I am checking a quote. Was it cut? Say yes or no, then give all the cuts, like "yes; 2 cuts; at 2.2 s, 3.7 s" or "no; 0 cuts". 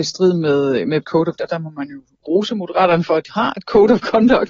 yes; 3 cuts; at 1.0 s, 1.4 s, 3.3 s